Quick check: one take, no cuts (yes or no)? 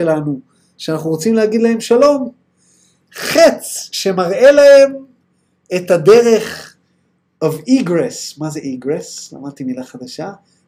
yes